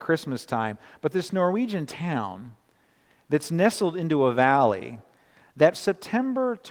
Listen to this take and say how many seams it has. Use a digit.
2